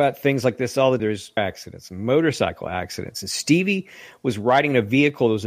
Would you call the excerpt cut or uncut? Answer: cut